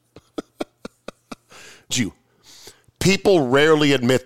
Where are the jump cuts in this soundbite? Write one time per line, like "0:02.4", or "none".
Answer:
0:01.9